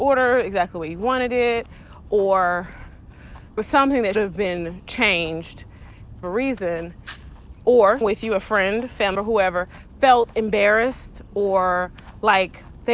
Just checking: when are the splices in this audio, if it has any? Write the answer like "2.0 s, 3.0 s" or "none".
3.6 s, 4.1 s, 6.2 s, 8.0 s, 9.1 s